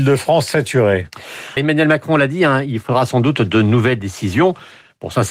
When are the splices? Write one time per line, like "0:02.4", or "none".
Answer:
0:01.6

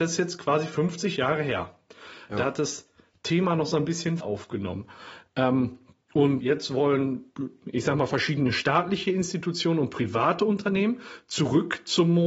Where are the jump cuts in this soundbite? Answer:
0:04.2
0:06.4

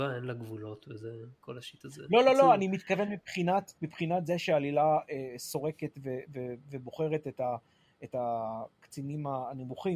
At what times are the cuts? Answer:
0:03.8

